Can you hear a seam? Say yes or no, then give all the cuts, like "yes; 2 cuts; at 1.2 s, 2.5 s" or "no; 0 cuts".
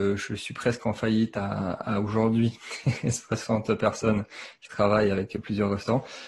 no; 0 cuts